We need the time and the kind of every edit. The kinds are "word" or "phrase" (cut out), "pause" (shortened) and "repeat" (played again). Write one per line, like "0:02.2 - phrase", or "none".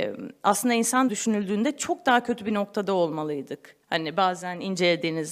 0:01.1 - word
0:03.8 - pause